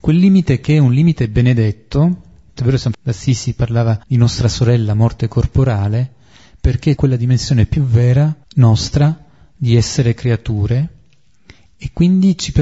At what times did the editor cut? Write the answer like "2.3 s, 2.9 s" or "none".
2.6 s, 2.9 s, 4.0 s, 7.0 s, 8.4 s